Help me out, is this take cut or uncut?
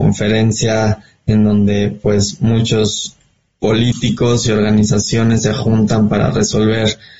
uncut